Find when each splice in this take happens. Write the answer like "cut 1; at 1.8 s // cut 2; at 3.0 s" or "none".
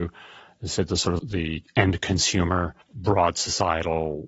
cut 1; at 1.2 s // cut 2; at 2.8 s